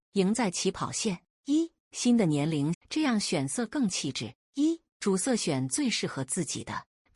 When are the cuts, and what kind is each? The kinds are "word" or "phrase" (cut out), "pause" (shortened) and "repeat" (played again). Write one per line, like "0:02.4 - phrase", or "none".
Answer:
0:02.7 - phrase